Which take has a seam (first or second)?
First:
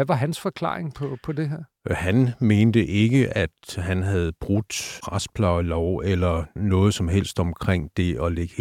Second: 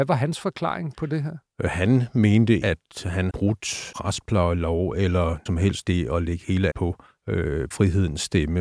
second